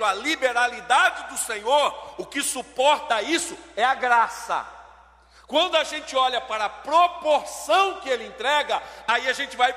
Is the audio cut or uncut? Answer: uncut